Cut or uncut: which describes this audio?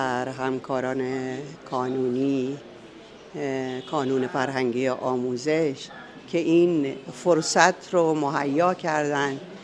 uncut